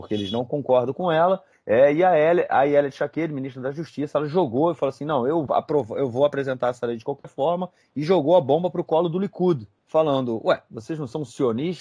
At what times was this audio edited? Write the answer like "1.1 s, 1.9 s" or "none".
5.5 s